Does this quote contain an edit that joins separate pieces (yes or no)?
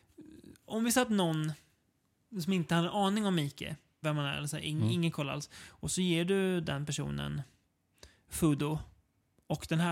yes